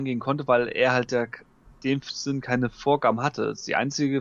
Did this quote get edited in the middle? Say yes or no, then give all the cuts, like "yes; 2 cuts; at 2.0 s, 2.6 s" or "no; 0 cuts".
no; 0 cuts